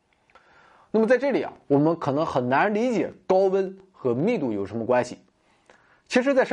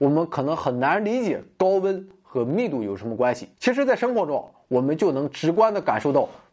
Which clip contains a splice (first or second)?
second